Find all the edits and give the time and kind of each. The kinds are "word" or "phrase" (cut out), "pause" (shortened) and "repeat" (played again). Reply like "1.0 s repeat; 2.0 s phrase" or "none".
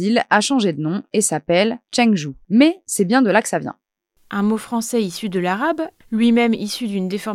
none